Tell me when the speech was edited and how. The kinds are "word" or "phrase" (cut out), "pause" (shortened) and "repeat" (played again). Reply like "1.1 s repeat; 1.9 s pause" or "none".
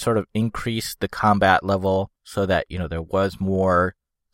2.2 s pause